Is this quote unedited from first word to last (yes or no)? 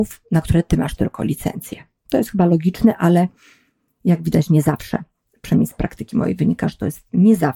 yes